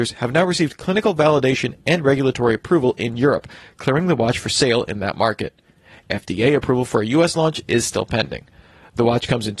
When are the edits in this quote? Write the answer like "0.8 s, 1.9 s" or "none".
none